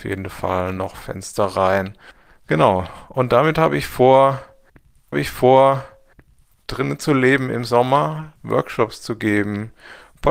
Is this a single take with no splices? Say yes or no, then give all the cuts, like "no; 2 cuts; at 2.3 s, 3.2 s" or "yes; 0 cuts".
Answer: no; 2 cuts; at 5.1 s, 8.4 s